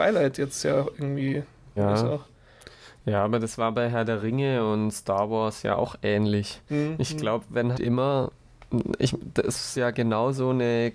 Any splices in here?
yes; 3 cuts; at 1.8 s, 7.7 s, 9.7 s

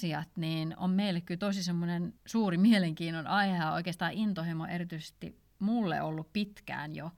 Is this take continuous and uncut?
no; 1 cut; at 2.2 s

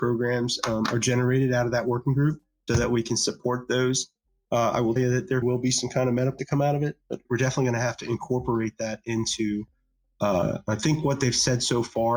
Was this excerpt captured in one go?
no; 5 cuts; at 2.7 s, 5.0 s, 5.4 s, 6.4 s, 7.2 s

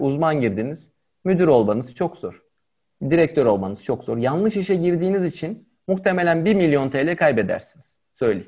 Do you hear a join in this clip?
no; 0 cuts

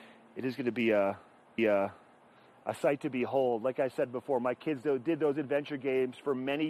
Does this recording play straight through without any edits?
no; 1 cut; at 1.6 s

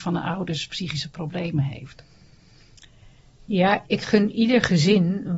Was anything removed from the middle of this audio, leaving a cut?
yes; 1 cut; at 3.8 s

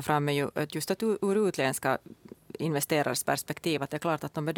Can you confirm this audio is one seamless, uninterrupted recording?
yes; 0 cuts

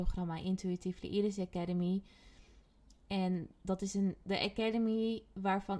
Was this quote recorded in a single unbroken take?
yes; 0 cuts

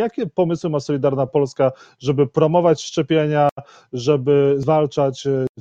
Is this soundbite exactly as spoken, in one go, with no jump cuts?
yes; 0 cuts

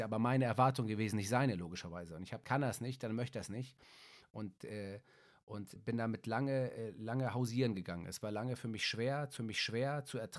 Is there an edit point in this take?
yes; 3 cuts; at 2.4 s, 5.8 s, 9.4 s

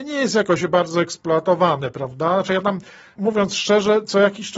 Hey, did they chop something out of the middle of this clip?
no; 0 cuts

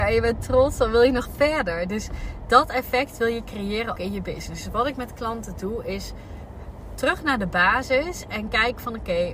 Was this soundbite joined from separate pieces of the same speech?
yes; 1 cut; at 4.0 s

